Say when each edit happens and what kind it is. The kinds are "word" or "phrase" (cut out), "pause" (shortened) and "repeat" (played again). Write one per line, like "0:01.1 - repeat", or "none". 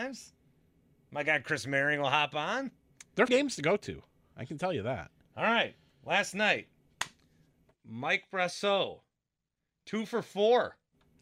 0:03.3 - word